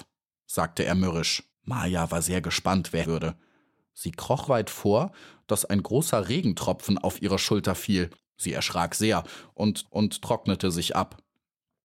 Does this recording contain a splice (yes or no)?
yes